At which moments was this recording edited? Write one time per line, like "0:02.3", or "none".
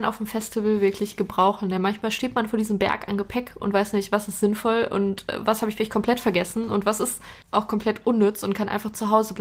0:07.4